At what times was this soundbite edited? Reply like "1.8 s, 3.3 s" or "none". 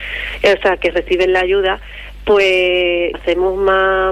3.1 s